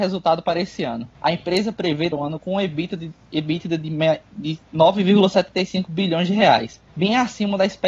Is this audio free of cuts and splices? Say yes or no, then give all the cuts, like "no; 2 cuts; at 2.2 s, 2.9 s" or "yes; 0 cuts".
no; 3 cuts; at 1.1 s, 2.1 s, 6.9 s